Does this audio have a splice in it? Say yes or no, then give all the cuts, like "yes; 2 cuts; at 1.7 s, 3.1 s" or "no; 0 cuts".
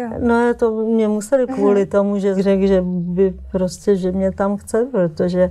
yes; 2 cuts; at 1.5 s, 2.4 s